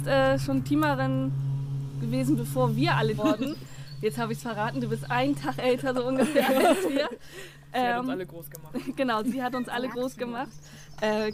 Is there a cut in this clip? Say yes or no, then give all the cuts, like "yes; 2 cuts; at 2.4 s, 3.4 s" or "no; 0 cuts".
yes; 1 cut; at 3.2 s